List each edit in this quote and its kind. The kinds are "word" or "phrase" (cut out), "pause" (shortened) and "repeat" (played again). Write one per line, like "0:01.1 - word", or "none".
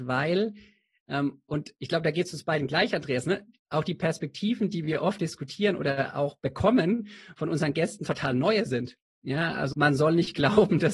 0:09.7 - word